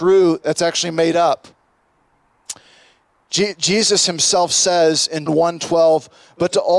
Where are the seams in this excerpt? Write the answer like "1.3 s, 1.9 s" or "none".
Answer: 5.3 s

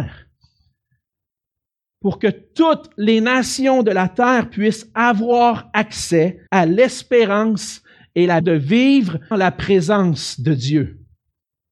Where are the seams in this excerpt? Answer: 6.5 s, 8.4 s, 9.3 s

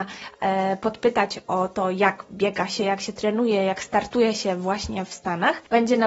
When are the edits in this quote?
none

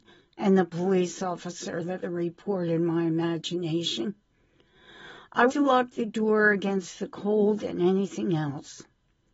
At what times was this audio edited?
2.0 s, 5.5 s

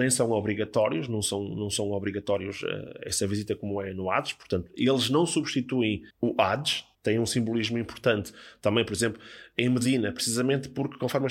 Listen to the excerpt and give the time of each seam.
6.1 s, 6.9 s

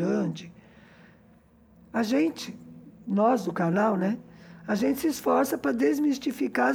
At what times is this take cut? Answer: none

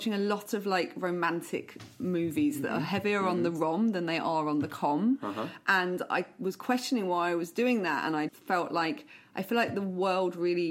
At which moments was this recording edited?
8.3 s

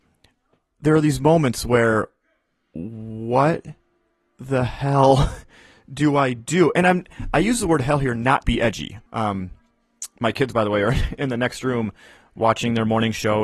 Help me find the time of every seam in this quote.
8.4 s, 9.1 s

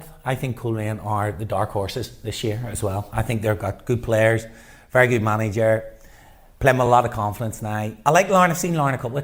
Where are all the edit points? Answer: none

